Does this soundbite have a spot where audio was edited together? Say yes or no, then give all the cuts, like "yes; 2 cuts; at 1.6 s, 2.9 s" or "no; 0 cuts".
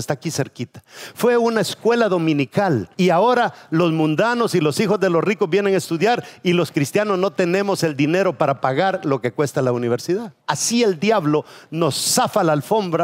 yes; 2 cuts; at 2.9 s, 10.4 s